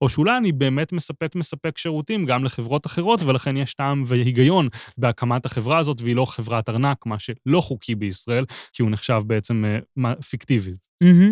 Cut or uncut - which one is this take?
cut